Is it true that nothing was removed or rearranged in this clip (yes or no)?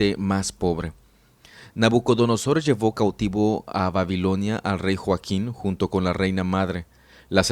yes